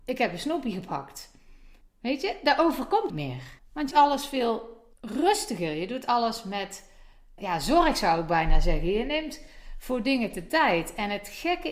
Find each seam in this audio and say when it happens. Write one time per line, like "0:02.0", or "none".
0:01.8
0:03.1
0:03.6
0:03.9
0:04.9
0:07.4